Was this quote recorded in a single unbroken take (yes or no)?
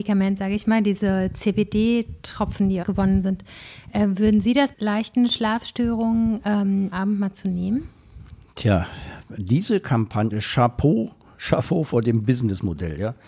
no